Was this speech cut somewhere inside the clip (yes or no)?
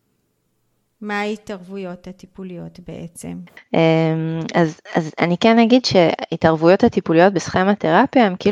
no